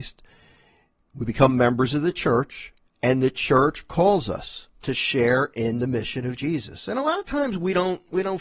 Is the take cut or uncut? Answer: cut